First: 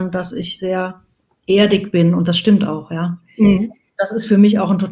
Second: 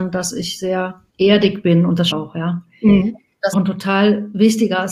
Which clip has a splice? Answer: second; 3 cuts; at 1.1 s, 2.1 s, 3.5 s

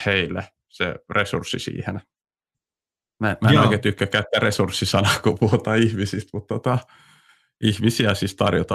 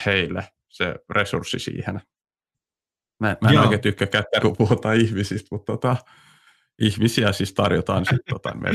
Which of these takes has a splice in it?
second; 1 cut; at 4.4 s

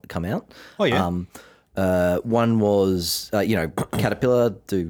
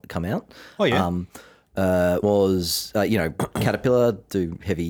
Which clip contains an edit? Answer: second; 1 cut; at 2.2 s

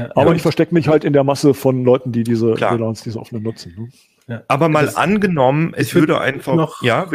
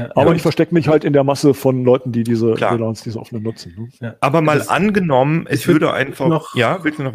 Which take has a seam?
second; 1 cut; at 4.0 s

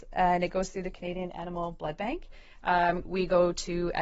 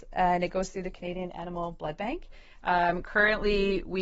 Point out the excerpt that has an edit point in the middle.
first; 1 cut; at 3.0 s

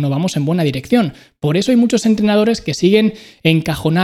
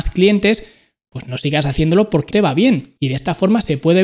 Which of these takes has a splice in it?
second; 2 cuts; at 2.3 s, 3.0 s

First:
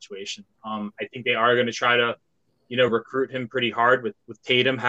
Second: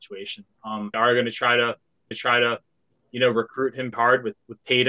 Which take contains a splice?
second; 3 cuts; at 0.9 s, 2.1 s, 3.9 s

